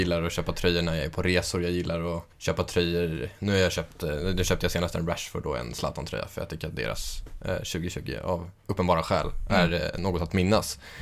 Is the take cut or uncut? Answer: cut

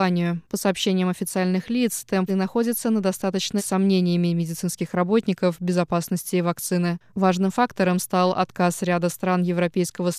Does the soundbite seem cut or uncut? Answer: cut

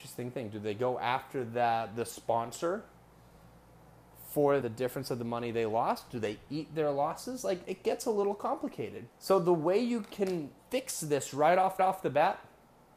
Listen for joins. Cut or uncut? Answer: cut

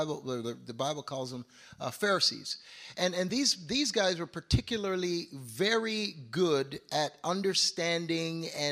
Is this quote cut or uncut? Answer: uncut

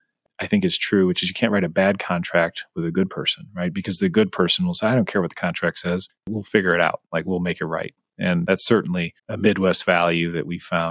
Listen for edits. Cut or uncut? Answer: cut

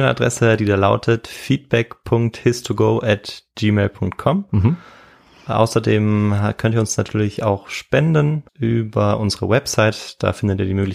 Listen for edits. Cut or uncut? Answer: cut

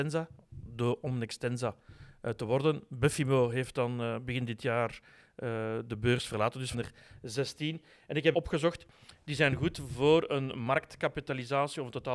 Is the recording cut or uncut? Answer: cut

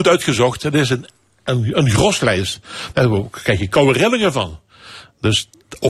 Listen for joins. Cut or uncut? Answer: uncut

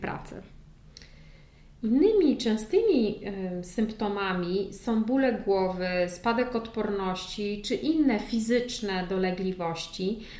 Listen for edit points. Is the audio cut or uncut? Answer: uncut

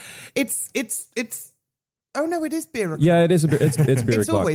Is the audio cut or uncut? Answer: uncut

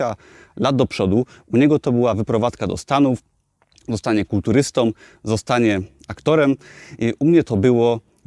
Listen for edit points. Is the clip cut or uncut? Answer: uncut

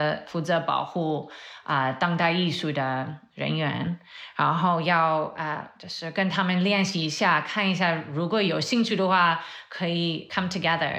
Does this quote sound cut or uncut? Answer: uncut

